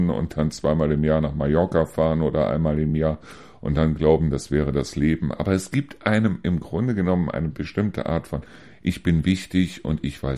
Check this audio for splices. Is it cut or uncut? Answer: uncut